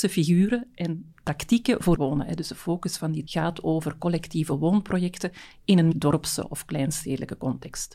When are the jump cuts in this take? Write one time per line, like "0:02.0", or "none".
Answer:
0:01.9
0:03.3
0:05.9